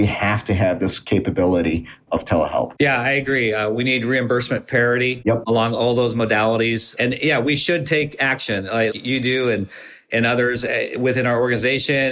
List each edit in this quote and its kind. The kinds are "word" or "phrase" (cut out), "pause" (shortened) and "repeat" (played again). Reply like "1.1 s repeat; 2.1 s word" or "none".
8.9 s word